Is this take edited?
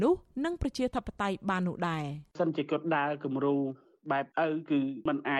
yes; 1 cut; at 4.3 s

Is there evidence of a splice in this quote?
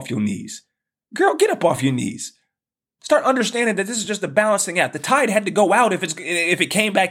no; 0 cuts

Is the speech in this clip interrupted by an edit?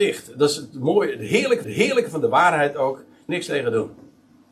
yes; 2 cuts; at 1.6 s, 3.3 s

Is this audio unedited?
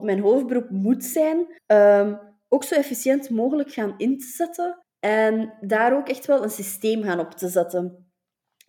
no; 2 cuts; at 1.6 s, 4.8 s

